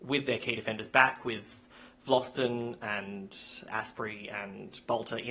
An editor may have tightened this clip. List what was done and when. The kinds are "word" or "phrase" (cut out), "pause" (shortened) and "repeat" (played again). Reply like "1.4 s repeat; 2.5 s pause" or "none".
3.7 s word